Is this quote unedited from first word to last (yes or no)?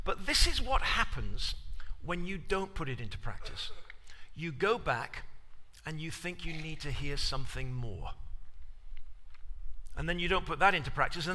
yes